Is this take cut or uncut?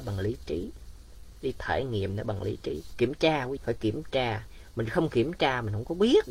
cut